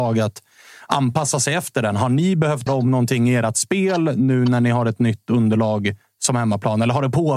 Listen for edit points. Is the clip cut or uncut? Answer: cut